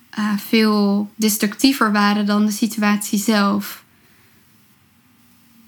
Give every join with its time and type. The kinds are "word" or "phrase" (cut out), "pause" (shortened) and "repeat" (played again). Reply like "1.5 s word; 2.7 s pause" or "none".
1.1 s pause